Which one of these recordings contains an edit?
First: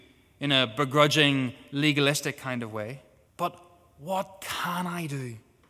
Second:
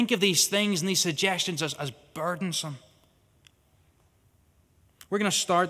first; 1 cut; at 3.3 s

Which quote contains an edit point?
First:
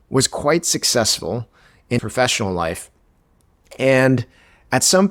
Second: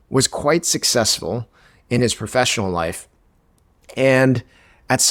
first; 1 cut; at 2.0 s

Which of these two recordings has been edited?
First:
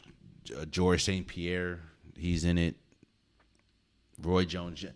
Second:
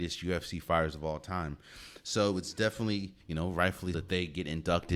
second; 2 cuts; at 3.2 s, 3.9 s

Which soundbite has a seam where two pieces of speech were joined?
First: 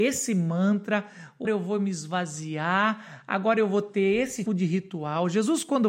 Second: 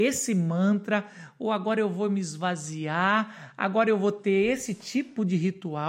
first; 2 cuts; at 1.4 s, 4.5 s

